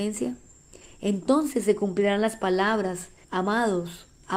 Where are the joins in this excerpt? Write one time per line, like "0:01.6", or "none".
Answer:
0:03.2

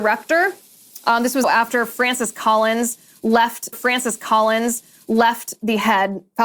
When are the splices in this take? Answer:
0:01.4
0:03.7

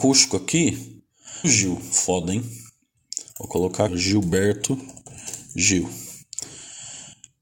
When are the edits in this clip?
0:01.4
0:03.3
0:03.9

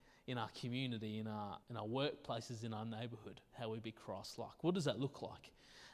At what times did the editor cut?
0:01.6

